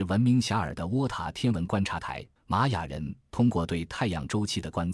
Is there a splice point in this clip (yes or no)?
yes